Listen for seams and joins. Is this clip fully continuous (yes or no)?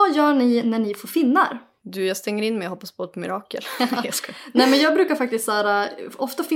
yes